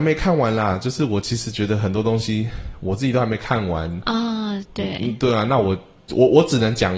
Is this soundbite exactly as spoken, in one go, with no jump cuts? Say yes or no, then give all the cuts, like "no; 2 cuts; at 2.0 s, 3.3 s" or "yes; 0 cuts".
yes; 0 cuts